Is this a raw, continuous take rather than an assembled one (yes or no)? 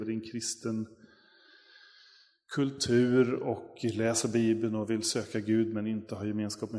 yes